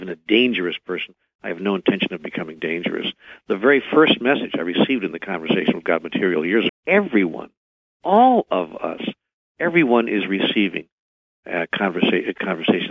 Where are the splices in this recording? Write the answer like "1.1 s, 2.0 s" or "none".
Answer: 6.7 s